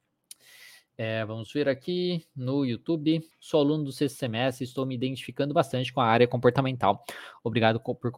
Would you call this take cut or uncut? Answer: cut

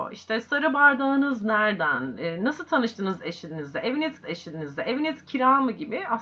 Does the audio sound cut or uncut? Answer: cut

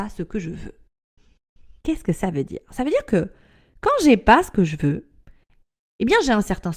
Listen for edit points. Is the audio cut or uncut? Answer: cut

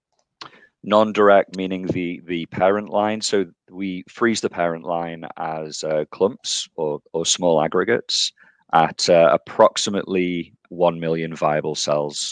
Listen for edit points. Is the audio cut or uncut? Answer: cut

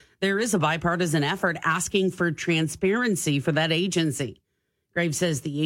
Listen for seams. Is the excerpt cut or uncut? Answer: uncut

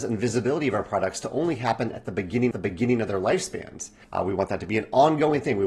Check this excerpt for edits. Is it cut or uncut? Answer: cut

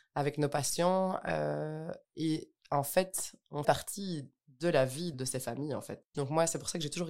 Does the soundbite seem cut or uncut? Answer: cut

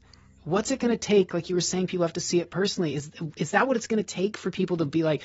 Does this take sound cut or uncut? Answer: uncut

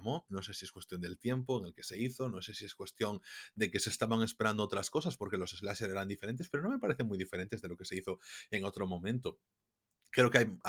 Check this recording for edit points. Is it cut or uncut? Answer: uncut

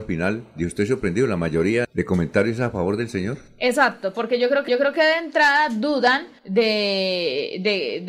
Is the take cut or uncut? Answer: cut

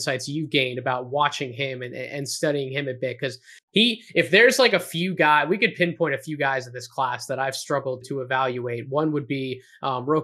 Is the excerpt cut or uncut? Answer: cut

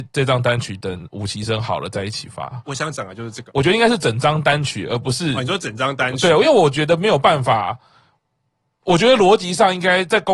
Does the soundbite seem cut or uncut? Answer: uncut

